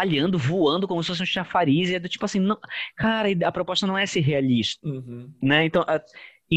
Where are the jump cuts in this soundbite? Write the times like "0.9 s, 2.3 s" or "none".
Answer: none